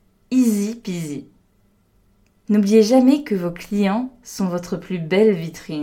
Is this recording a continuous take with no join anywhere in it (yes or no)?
yes